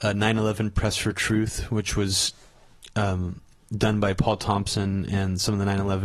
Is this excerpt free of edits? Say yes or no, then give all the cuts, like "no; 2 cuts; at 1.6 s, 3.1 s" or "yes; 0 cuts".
yes; 0 cuts